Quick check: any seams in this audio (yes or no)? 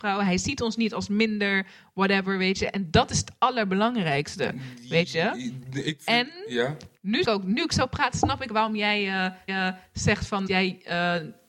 yes